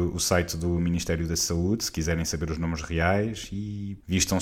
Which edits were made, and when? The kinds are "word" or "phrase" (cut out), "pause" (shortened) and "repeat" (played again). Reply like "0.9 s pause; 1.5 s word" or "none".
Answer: none